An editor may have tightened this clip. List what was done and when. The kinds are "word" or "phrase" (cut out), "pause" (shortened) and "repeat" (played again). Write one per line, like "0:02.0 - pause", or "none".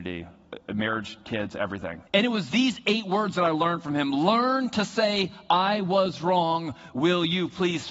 0:02.1 - pause